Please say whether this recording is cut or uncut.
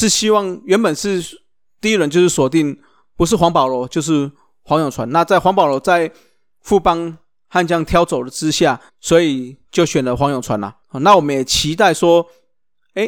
cut